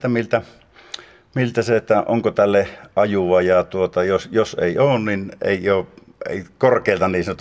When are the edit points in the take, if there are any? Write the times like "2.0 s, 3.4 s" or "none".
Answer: none